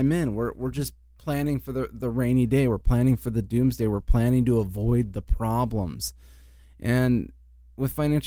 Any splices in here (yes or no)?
no